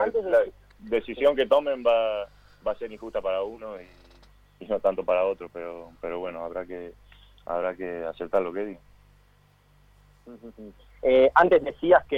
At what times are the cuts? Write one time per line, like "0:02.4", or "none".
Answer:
none